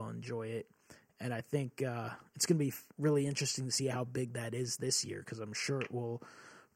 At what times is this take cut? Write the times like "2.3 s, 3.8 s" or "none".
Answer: 2.9 s

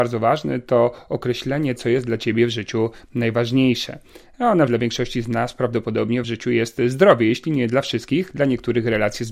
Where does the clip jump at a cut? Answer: 1.8 s, 4.7 s, 6.2 s

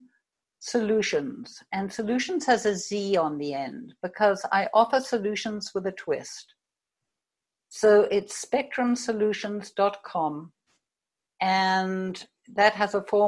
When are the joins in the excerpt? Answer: none

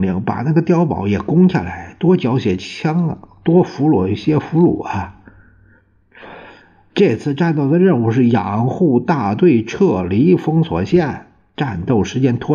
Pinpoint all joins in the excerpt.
none

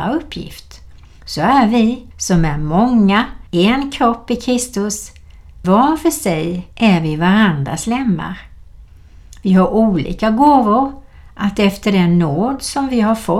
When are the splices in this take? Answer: 2.1 s, 3.5 s, 5.6 s, 6.7 s

